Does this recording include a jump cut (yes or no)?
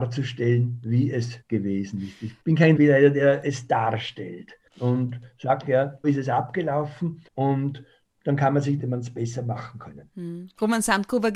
yes